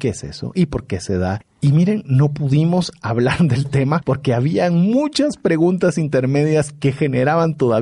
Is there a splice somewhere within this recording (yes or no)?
no